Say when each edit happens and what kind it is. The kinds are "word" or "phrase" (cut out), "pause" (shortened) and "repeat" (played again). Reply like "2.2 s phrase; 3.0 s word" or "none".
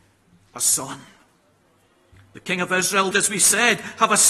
3.1 s word